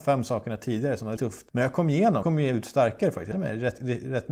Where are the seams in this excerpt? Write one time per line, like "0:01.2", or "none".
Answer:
0:01.2
0:01.5
0:02.2
0:03.3